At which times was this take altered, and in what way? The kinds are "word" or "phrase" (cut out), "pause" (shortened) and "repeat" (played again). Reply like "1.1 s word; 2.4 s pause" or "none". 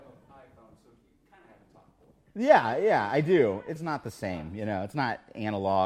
3.8 s word